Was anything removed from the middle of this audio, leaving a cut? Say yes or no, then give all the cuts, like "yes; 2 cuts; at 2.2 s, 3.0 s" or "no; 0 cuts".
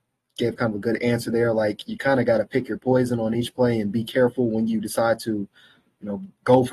no; 0 cuts